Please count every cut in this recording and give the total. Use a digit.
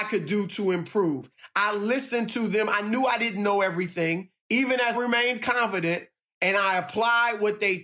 2